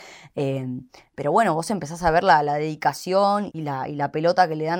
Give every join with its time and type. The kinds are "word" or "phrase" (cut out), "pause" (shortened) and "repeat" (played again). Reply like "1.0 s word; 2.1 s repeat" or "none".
3.5 s word